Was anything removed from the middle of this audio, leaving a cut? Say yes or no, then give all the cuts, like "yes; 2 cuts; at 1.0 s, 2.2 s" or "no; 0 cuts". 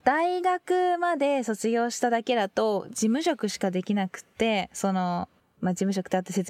yes; 1 cut; at 5.4 s